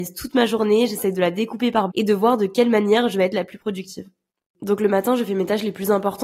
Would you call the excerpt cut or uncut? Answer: cut